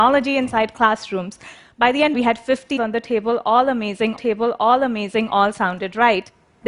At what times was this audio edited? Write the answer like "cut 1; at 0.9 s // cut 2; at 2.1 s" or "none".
cut 1; at 2.1 s // cut 2; at 2.8 s // cut 3; at 4.2 s